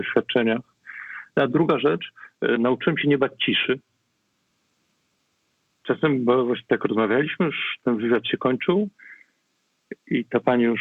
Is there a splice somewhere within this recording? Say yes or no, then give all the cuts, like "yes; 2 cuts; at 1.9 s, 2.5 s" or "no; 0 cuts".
no; 0 cuts